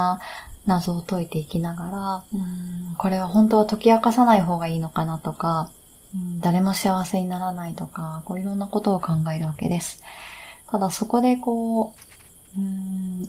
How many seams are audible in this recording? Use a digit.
0